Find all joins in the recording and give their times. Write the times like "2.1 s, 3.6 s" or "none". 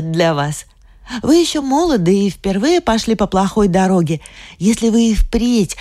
none